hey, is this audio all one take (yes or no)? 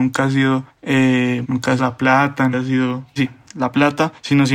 no